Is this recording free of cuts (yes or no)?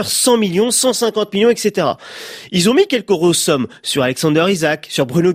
yes